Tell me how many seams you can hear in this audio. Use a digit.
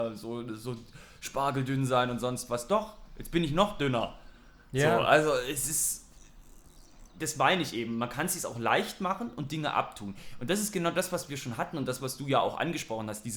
0